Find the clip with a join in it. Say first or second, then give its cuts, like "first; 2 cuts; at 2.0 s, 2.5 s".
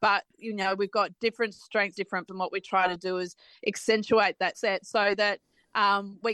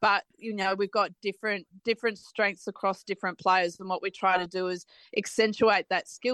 first; 4 cuts; at 1.2 s, 1.9 s, 2.3 s, 4.5 s